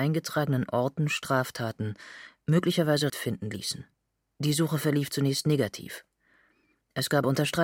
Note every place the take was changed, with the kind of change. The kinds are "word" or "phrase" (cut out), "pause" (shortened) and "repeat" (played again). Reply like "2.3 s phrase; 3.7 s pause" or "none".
3.1 s word